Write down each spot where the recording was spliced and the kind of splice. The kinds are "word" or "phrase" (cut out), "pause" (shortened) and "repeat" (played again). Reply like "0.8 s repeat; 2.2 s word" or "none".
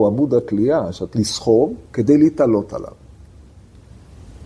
1.1 s word; 1.9 s pause